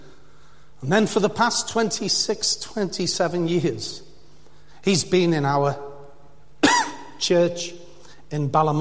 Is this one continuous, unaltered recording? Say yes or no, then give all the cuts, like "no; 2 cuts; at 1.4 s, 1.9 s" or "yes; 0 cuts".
yes; 0 cuts